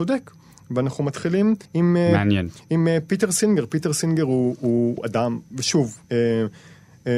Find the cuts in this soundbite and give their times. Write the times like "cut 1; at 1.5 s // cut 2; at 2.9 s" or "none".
cut 1; at 1.6 s // cut 2; at 5.0 s // cut 3; at 6.0 s